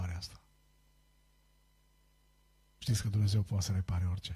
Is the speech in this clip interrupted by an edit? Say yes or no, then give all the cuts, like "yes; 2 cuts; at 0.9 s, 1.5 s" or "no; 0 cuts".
no; 0 cuts